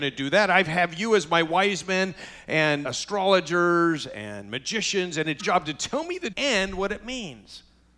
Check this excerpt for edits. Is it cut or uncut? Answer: cut